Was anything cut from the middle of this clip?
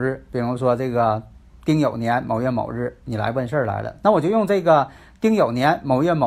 no; 0 cuts

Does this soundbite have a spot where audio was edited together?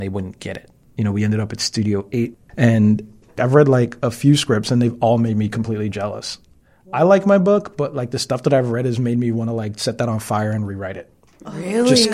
no; 0 cuts

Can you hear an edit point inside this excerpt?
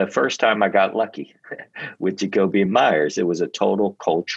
no; 0 cuts

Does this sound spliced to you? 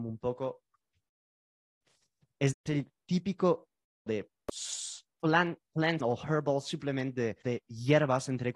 yes; 4 cuts; at 2.5 s, 4.1 s, 6.0 s, 7.4 s

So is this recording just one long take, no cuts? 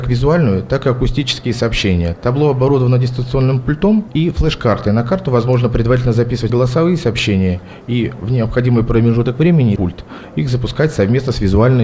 no; 2 cuts; at 6.5 s, 9.8 s

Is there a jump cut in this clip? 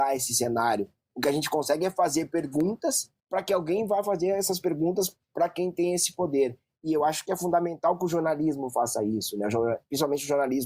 yes; 1 cut; at 3.2 s

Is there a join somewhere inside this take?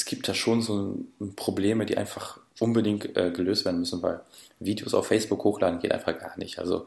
yes; 1 cut; at 2.5 s

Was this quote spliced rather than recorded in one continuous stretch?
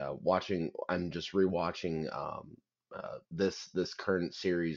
yes; 1 cut; at 3.2 s

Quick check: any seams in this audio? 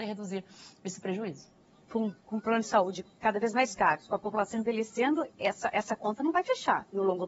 no; 0 cuts

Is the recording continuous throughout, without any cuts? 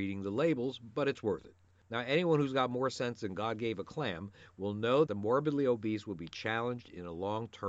no; 1 cut; at 5.1 s

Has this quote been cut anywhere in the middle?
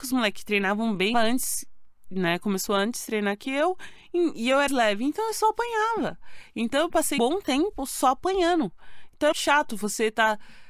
yes; 4 cuts; at 1.1 s, 4.7 s, 7.2 s, 9.3 s

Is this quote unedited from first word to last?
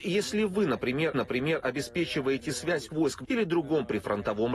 no; 3 cuts; at 1.1 s, 2.9 s, 3.2 s

